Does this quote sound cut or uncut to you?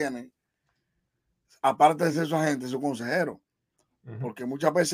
uncut